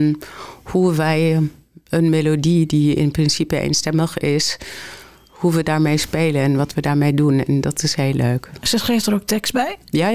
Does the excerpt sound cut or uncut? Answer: uncut